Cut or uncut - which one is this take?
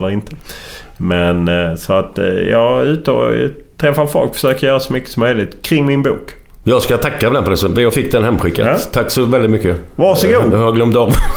uncut